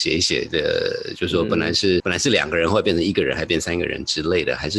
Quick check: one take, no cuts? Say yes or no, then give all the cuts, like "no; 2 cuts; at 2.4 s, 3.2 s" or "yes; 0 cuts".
no; 1 cut; at 2.0 s